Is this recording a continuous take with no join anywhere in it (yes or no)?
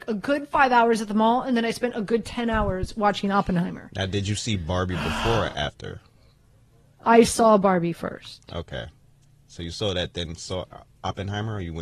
yes